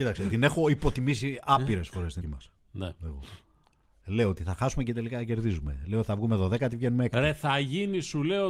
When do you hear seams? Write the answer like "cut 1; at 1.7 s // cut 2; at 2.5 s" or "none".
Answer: cut 1; at 2.2 s